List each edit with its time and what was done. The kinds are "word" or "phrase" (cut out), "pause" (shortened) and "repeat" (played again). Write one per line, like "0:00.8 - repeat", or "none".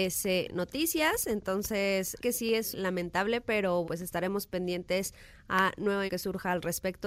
0:02.2 - phrase
0:02.7 - phrase
0:03.8 - word
0:06.1 - word